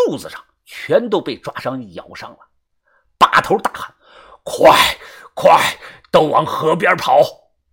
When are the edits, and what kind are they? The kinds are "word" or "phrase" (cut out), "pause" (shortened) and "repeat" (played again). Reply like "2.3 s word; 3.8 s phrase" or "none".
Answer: none